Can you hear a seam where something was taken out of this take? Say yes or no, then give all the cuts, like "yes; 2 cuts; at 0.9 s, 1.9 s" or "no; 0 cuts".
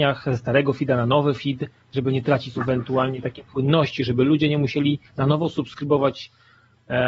yes; 2 cuts; at 2.5 s, 5.1 s